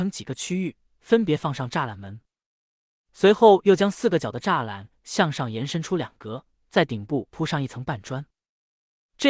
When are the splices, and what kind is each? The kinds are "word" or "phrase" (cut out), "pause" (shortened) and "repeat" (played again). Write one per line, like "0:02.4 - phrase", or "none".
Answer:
none